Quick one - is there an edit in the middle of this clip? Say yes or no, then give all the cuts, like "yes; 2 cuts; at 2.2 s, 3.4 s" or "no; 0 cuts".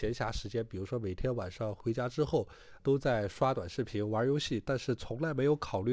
yes; 1 cut; at 2.8 s